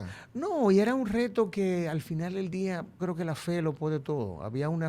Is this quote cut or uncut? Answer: cut